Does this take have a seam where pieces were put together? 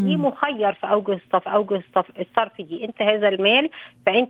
yes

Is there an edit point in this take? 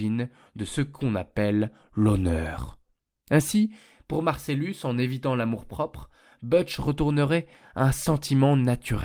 no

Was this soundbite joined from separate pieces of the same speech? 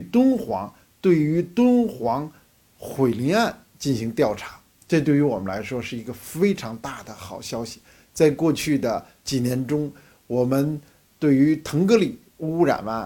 no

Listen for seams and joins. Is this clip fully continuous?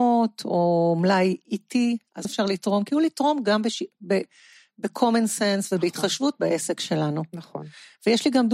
no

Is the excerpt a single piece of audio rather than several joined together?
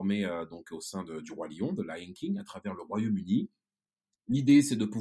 yes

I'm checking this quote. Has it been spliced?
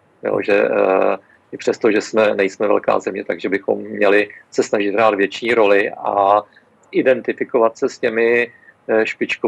no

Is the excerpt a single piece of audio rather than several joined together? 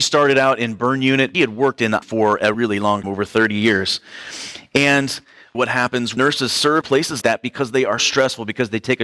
no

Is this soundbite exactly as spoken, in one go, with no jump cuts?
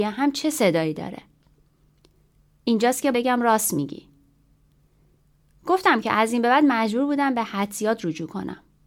no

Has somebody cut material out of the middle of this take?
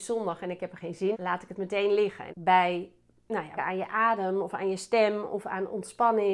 yes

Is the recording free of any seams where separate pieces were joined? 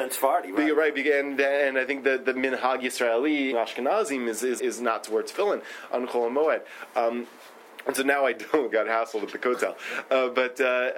no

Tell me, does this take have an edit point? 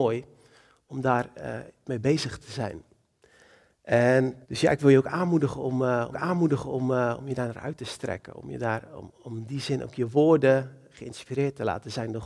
yes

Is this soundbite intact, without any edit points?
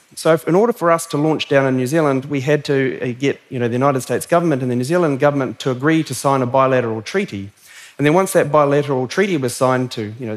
yes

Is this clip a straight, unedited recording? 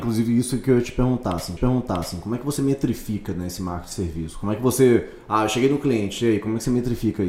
no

